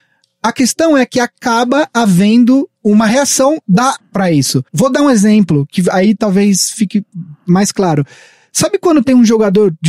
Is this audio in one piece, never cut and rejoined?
no; 3 cuts; at 2.8 s, 4.0 s, 4.7 s

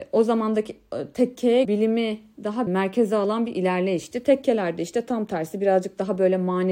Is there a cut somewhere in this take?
yes; 2 cuts; at 1.6 s, 2.7 s

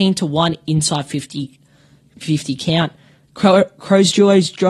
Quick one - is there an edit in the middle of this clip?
no; 0 cuts

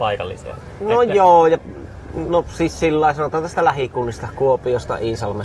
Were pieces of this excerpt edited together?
no; 0 cuts

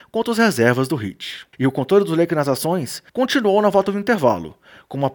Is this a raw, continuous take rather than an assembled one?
no; 2 cuts; at 1.5 s, 3.1 s

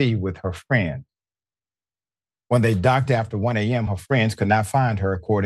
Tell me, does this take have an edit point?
no; 0 cuts

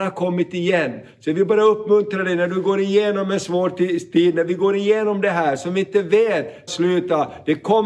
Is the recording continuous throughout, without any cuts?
no; 1 cut; at 6.7 s

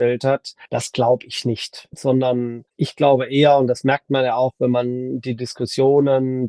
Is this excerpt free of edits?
yes; 0 cuts

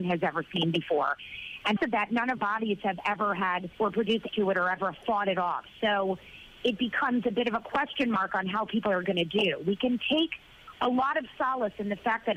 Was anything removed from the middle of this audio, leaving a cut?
yes; 4 cuts; at 1.8 s, 2.4 s, 3.8 s, 4.3 s

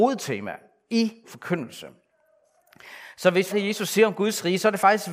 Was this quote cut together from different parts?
yes; 2 cuts; at 1.2 s, 3.5 s

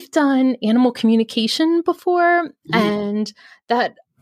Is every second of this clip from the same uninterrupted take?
yes; 0 cuts

